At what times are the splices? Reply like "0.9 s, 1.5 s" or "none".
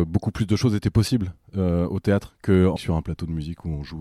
2.8 s